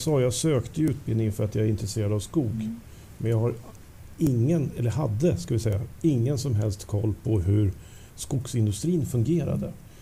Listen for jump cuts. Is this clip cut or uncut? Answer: uncut